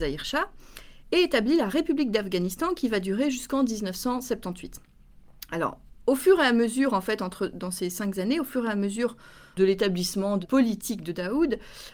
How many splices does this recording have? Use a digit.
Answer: 1